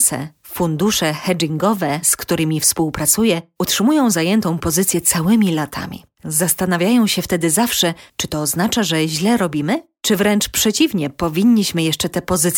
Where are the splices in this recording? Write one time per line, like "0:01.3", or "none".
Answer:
0:08.1